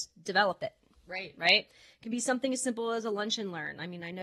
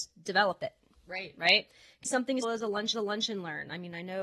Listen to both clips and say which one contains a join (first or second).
second